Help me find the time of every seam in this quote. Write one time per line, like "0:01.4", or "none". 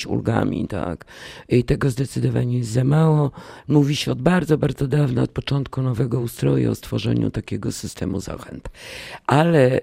none